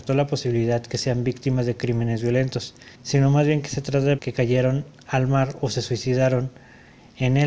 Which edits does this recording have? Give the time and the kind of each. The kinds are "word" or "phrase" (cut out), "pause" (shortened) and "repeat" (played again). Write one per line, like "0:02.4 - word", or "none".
0:02.9 - pause
0:04.2 - word